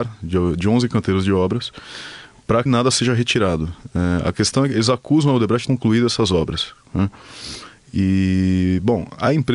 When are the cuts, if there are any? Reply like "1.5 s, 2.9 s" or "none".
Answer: 2.7 s, 5.7 s